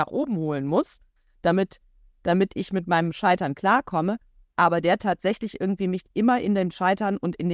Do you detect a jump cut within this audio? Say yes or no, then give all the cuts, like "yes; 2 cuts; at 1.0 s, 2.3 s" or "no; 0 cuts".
no; 0 cuts